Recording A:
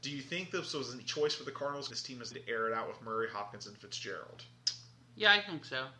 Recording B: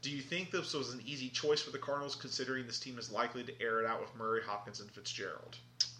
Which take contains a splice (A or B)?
A